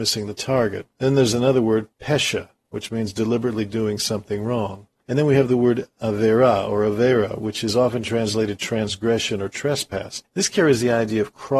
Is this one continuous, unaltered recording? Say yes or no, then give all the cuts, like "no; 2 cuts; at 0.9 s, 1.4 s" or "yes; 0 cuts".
yes; 0 cuts